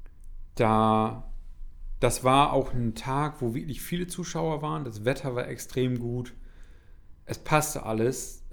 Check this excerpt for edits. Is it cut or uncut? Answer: uncut